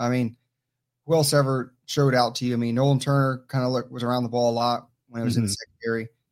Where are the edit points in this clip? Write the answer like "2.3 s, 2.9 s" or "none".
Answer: none